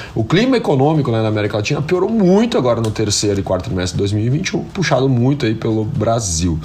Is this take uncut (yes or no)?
yes